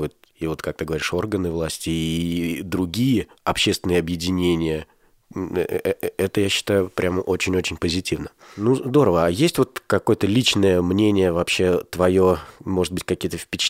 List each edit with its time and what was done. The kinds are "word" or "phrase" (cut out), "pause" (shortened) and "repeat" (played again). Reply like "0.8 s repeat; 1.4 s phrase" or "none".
3.4 s pause

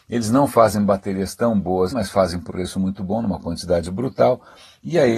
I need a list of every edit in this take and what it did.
1.9 s word; 2.5 s word

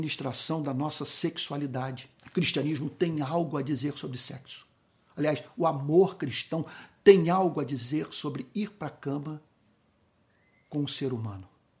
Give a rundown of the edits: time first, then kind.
2.2 s pause

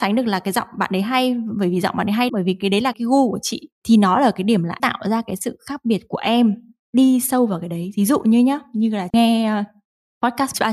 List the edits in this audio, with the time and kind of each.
2.3 s word; 2.9 s word; 4.8 s word; 9.1 s word

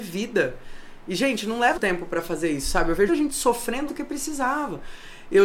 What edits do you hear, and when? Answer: 1.8 s word; 3.1 s word; 3.9 s word

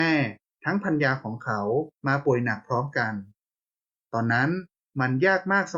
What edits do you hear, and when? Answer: 2.0 s pause

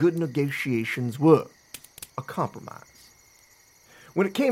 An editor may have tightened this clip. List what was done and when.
2.1 s pause

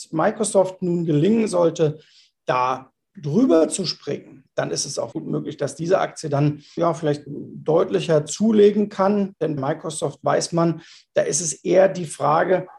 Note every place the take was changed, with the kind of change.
5.1 s word; 6.8 s word; 7.3 s word; 9.6 s word

